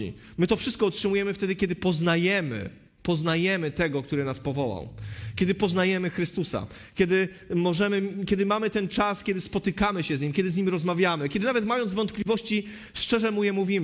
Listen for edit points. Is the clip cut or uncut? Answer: uncut